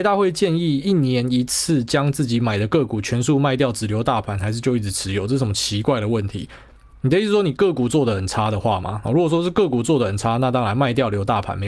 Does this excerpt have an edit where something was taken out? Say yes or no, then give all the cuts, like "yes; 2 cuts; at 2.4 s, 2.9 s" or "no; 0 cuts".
no; 0 cuts